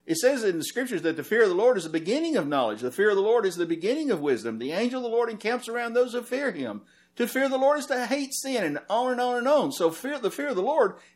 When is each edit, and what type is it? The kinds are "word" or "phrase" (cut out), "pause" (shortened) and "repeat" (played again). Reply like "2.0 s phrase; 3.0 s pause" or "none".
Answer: none